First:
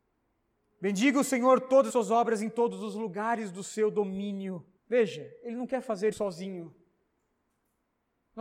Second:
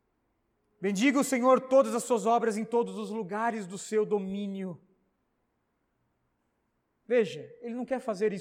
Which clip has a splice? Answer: first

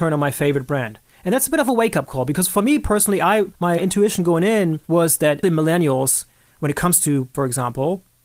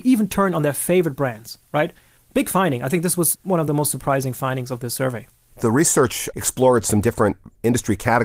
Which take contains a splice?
first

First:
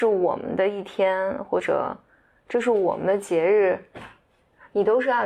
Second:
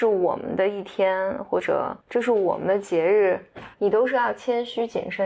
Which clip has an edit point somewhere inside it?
second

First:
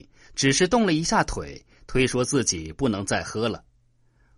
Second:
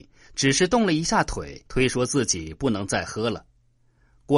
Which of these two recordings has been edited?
second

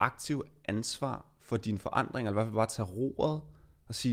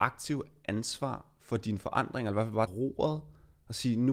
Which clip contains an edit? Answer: second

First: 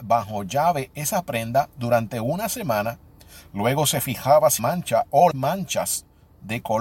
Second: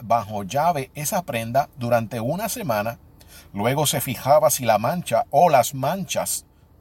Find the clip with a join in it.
first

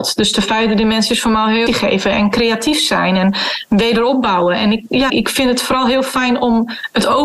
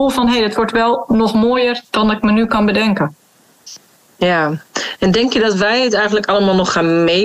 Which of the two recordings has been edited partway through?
first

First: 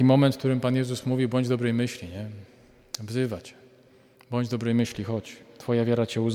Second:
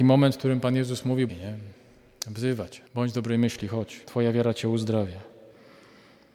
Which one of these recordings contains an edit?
second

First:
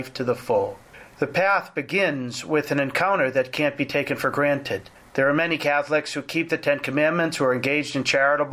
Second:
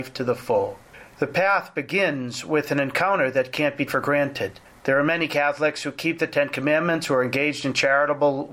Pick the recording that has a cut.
second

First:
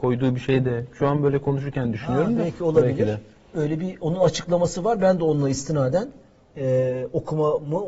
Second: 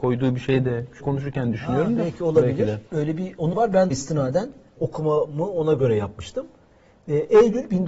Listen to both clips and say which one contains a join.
second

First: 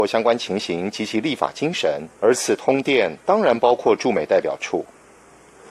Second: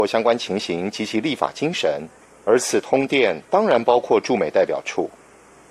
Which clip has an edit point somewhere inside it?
first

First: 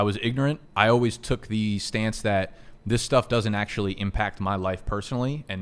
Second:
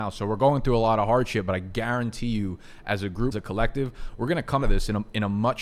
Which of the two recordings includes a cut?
second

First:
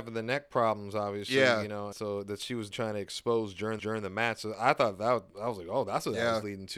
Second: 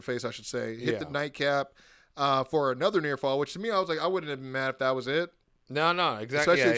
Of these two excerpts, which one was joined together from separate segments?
first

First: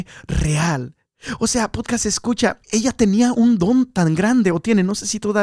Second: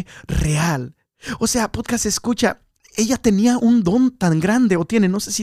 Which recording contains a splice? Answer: first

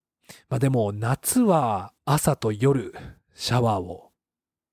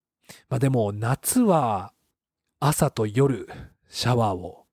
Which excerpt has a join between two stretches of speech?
first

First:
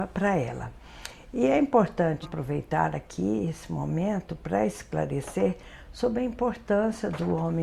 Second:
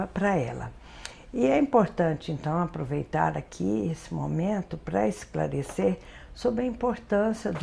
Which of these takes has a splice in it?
first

